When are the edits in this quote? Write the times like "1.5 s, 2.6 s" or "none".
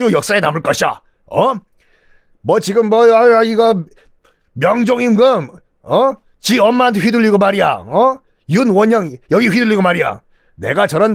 none